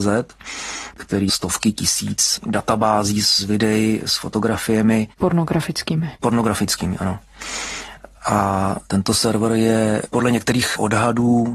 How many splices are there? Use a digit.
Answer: 1